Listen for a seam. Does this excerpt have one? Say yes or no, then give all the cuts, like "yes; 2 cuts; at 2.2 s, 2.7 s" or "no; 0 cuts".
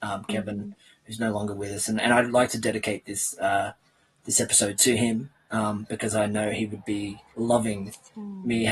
no; 0 cuts